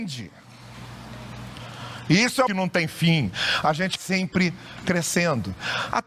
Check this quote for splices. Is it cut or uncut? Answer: cut